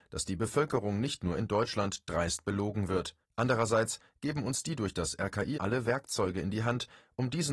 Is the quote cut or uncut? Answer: cut